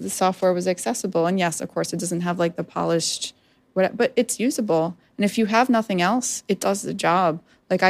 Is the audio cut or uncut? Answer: uncut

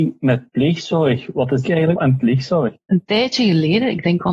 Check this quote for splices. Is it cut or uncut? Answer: cut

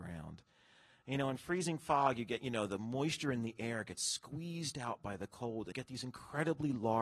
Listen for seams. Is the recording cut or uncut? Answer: cut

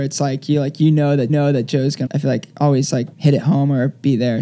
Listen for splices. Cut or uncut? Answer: cut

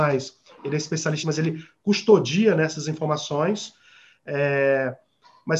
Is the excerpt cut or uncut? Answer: cut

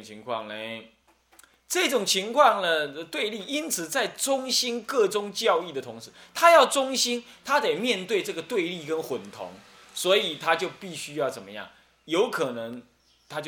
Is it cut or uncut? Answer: uncut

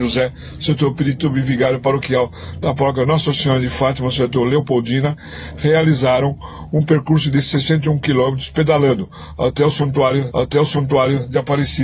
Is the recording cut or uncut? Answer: cut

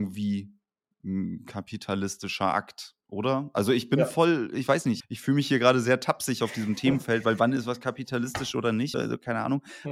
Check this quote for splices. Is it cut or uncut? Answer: cut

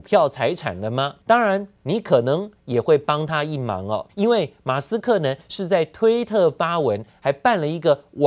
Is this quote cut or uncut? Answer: cut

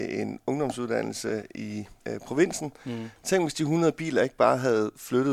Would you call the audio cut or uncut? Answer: cut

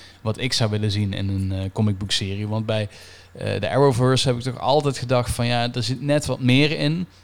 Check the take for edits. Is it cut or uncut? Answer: uncut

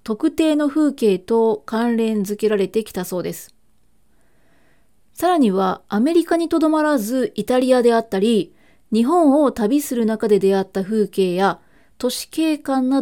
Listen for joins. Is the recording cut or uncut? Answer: uncut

